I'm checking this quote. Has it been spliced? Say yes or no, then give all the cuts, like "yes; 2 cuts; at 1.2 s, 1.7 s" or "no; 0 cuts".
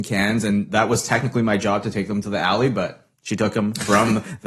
yes; 1 cut; at 3.1 s